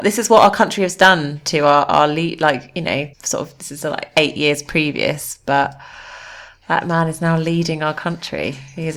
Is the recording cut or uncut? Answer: cut